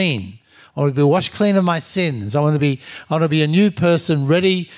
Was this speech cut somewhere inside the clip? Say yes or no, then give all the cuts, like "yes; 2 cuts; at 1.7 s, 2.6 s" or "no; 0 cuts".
no; 0 cuts